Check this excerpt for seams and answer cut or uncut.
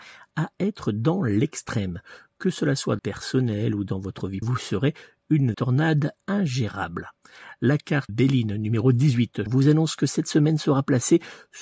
cut